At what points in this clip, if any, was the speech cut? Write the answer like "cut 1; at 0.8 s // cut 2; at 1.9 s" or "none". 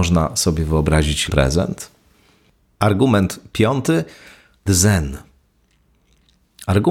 cut 1; at 1.3 s // cut 2; at 4.7 s